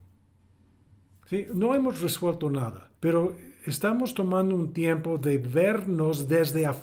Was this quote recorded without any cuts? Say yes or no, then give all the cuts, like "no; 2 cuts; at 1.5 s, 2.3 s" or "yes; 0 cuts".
no; 1 cut; at 2.9 s